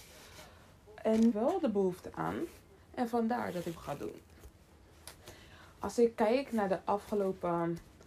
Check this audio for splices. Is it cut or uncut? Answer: cut